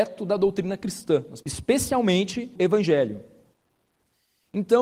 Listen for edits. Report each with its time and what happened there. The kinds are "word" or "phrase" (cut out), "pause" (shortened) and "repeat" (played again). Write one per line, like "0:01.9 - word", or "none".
0:01.4 - phrase
0:02.5 - word